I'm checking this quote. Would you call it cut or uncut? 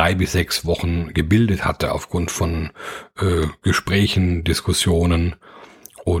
uncut